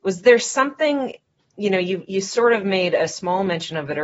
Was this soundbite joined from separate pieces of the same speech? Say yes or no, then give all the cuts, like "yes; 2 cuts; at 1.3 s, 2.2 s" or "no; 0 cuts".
no; 0 cuts